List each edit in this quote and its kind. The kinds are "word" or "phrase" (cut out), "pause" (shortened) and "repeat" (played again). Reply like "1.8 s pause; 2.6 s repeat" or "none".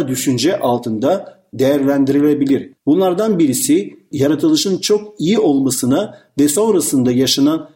2.8 s pause; 4.1 s word